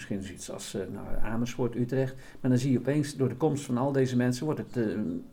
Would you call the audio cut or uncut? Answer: uncut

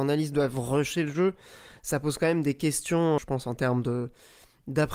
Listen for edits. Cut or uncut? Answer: cut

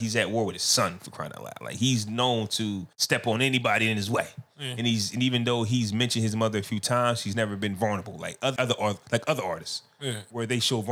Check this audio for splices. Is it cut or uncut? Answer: cut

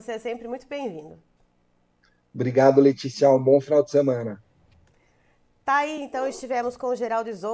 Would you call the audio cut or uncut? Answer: uncut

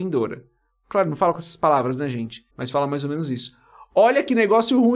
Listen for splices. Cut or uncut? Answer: cut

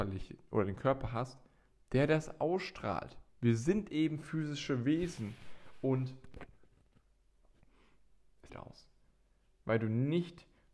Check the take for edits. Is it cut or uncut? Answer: cut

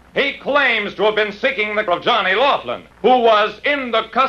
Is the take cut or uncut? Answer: cut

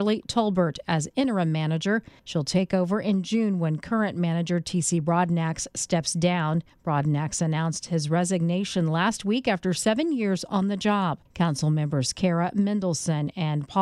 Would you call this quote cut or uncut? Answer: cut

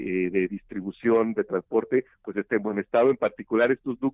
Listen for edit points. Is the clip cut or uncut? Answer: uncut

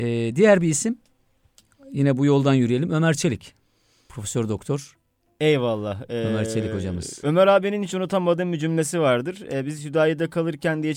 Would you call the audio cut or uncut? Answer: uncut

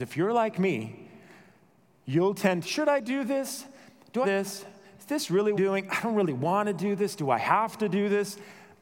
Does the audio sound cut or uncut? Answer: cut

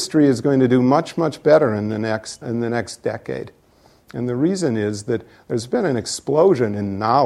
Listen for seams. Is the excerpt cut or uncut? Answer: cut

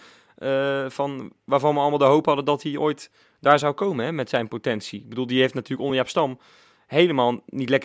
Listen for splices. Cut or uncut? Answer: uncut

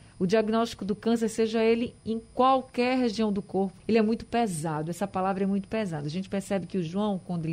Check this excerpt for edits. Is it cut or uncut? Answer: cut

